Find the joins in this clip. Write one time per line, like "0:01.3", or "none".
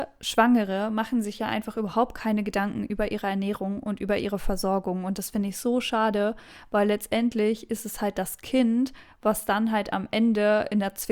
none